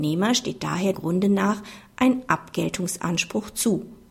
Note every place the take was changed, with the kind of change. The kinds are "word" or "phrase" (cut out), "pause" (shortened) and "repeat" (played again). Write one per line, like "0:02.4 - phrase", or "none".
0:00.9 - word